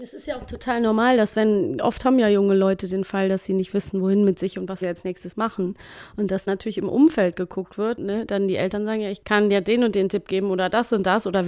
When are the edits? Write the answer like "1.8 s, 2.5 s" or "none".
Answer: 1.8 s, 4.8 s, 6.5 s, 8.0 s